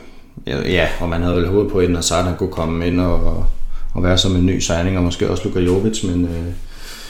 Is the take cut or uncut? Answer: uncut